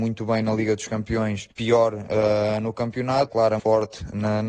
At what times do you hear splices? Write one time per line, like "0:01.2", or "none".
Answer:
0:01.5
0:03.3
0:03.6